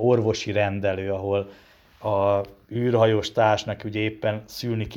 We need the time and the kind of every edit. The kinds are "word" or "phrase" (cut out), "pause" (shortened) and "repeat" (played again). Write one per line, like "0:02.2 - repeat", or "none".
none